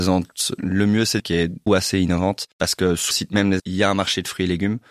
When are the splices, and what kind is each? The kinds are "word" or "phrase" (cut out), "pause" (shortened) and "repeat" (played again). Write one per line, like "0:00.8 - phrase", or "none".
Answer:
0:01.2 - word
0:01.7 - word
0:02.5 - pause
0:03.1 - word
0:03.6 - word